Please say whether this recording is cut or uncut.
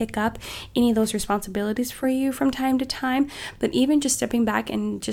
uncut